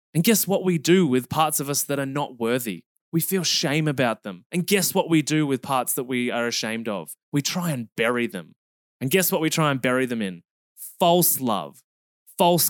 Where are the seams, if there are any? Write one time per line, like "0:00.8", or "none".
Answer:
0:07.2